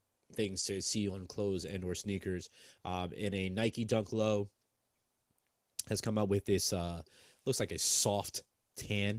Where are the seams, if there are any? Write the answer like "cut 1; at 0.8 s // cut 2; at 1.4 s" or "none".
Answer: none